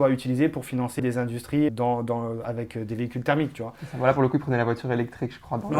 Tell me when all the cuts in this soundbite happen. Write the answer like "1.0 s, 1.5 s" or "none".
1.0 s, 1.7 s